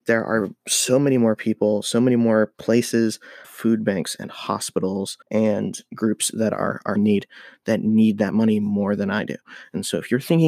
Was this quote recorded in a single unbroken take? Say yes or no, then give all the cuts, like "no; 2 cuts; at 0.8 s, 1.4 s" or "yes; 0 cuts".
no; 3 cuts; at 3.4 s, 5.2 s, 7.0 s